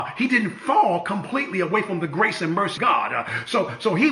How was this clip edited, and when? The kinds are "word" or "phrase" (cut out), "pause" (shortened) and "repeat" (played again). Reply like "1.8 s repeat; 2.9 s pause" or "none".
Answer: 2.8 s word